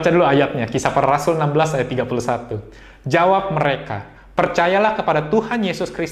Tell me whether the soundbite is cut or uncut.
uncut